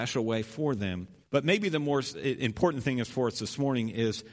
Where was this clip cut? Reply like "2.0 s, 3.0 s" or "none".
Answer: 1.2 s